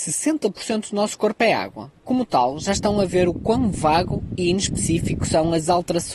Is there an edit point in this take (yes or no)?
no